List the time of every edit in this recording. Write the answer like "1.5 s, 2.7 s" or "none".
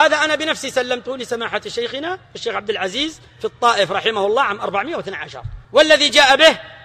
2.2 s, 5.6 s